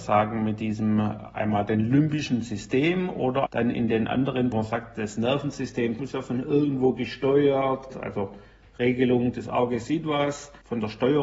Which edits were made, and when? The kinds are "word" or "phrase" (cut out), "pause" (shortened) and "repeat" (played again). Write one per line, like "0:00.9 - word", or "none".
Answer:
0:03.5 - word
0:04.5 - phrase
0:06.0 - word
0:07.9 - word